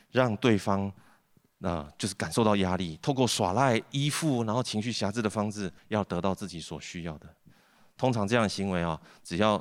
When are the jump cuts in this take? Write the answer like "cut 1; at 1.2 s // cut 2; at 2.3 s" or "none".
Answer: cut 1; at 5.8 s

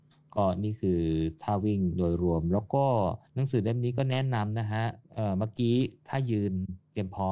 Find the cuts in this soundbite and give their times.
cut 1; at 3.3 s // cut 2; at 5.0 s

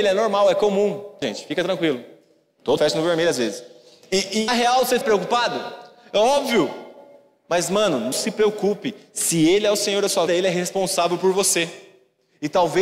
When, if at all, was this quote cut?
cut 1; at 1.2 s // cut 2; at 2.8 s // cut 3; at 4.5 s // cut 4; at 5.0 s // cut 5; at 8.1 s // cut 6; at 10.3 s

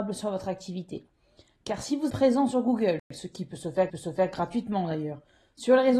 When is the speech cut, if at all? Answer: cut 1; at 2.1 s // cut 2; at 3.0 s // cut 3; at 3.9 s

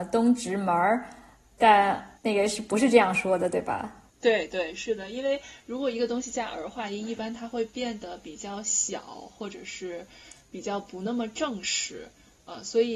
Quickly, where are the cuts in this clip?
cut 1; at 2.2 s // cut 2; at 4.1 s

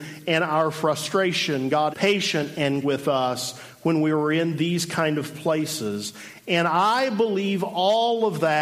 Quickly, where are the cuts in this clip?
cut 1; at 1.9 s // cut 2; at 2.8 s

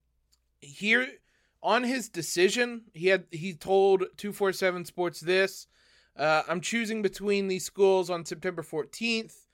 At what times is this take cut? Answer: none

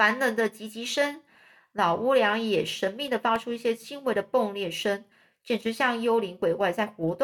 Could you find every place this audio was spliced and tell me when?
none

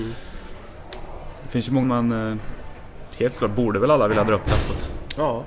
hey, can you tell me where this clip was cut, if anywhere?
cut 1; at 1.8 s

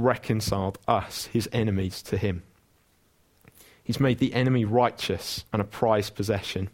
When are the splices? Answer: cut 1; at 5.5 s

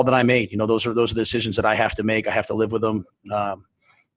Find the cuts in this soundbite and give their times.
none

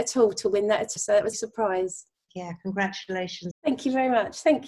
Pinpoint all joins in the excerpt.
cut 1; at 1.0 s // cut 2; at 1.3 s // cut 3; at 2.3 s // cut 4; at 3.5 s

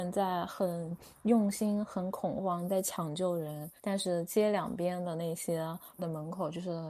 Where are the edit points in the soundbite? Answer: cut 1; at 3.8 s // cut 2; at 6.0 s

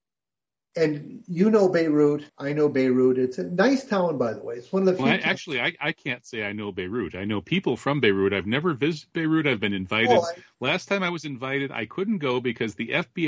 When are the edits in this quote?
cut 1; at 2.3 s

